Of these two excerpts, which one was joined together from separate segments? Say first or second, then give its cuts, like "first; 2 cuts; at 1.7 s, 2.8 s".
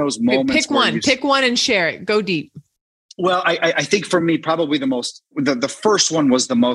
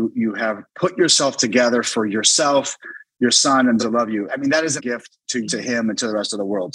second; 4 cuts; at 3.8 s, 4.3 s, 4.8 s, 5.4 s